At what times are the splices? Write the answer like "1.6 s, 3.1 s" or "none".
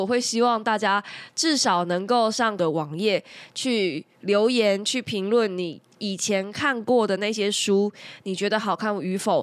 2.6 s